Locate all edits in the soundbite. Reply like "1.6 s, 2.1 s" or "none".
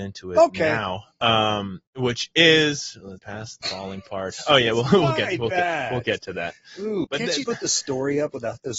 1.9 s, 3.2 s, 3.6 s, 7.0 s, 7.4 s